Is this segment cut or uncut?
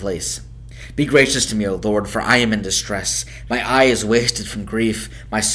uncut